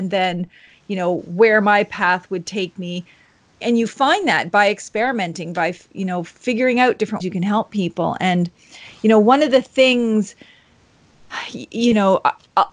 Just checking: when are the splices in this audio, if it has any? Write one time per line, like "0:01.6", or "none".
0:03.6
0:07.2